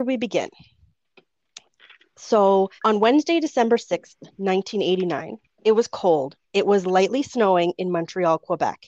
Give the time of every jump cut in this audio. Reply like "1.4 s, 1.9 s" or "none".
2.8 s, 5.4 s, 6.4 s

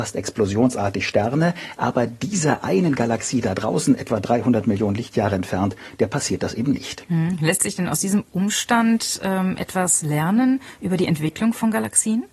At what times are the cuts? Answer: none

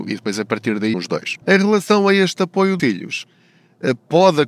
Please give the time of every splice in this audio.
0.9 s, 1.4 s, 2.8 s

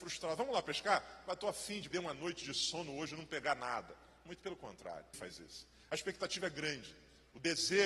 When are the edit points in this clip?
1.9 s, 5.1 s

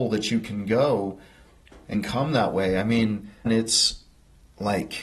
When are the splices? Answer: 1.9 s, 3.5 s

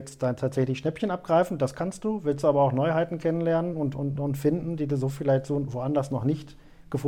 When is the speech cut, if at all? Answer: none

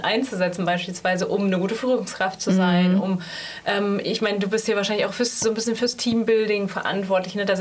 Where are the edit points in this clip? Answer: none

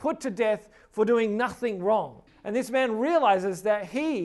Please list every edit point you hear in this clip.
2.3 s

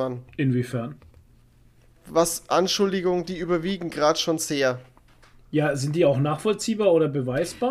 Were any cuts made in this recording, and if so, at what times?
none

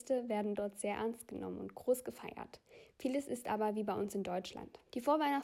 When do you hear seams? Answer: none

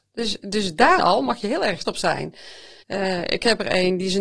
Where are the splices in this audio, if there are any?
1.0 s, 1.8 s, 2.8 s

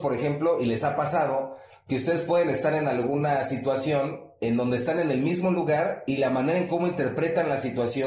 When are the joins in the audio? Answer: none

